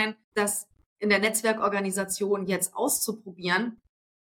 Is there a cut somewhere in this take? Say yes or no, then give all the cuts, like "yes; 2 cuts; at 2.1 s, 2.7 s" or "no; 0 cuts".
no; 0 cuts